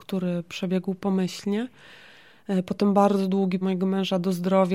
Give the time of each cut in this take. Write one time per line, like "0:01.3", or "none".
0:03.6